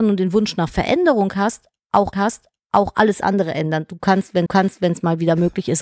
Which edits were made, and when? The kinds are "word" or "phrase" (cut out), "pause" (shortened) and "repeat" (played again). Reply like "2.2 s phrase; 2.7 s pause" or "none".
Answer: 2.1 s repeat; 4.5 s repeat